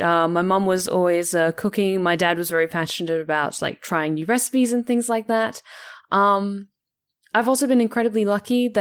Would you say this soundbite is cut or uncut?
uncut